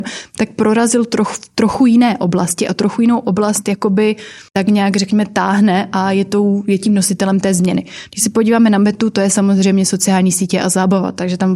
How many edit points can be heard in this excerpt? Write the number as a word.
one